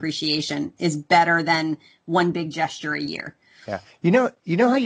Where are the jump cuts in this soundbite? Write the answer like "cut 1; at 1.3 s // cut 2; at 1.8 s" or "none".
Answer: none

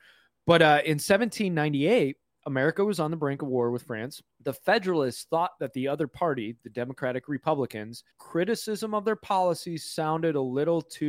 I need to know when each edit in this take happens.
cut 1; at 2.3 s // cut 2; at 4.3 s // cut 3; at 8.1 s

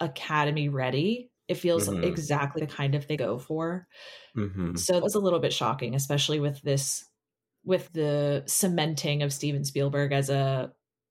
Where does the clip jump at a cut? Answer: cut 1; at 1.4 s // cut 2; at 2.6 s // cut 3; at 3.2 s // cut 4; at 5.0 s // cut 5; at 7.5 s // cut 6; at 7.9 s

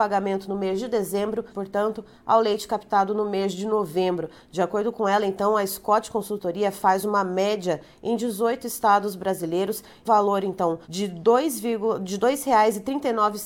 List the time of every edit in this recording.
cut 1; at 1.5 s // cut 2; at 10.0 s // cut 3; at 10.8 s

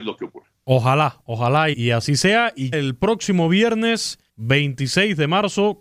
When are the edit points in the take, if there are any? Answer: cut 1; at 1.7 s // cut 2; at 2.7 s // cut 3; at 4.3 s

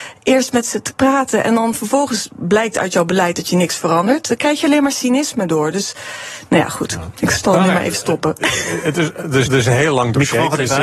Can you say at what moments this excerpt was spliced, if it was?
cut 1; at 9.5 s

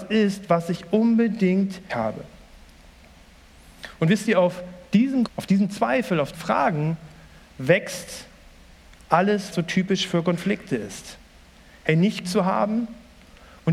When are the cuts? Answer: cut 1; at 1.9 s // cut 2; at 5.3 s // cut 3; at 6.3 s // cut 4; at 9.5 s // cut 5; at 12.2 s

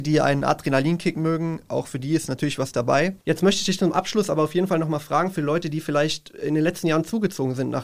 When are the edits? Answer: cut 1; at 3.2 s

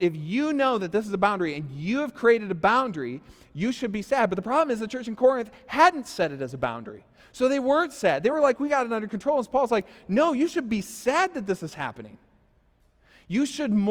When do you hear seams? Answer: none

